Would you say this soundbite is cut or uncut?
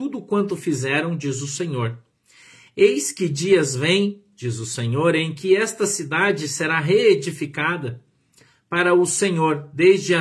uncut